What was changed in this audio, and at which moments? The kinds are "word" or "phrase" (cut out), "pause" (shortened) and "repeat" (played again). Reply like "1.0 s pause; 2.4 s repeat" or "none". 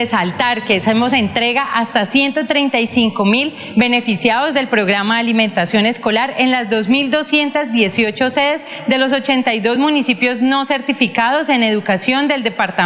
none